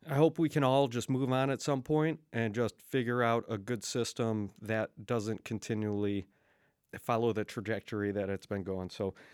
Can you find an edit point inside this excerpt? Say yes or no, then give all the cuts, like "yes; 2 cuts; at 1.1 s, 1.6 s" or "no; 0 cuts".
no; 0 cuts